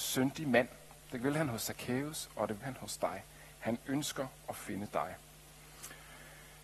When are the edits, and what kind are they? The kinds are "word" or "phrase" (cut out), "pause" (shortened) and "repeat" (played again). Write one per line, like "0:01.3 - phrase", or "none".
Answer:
0:02.6 - word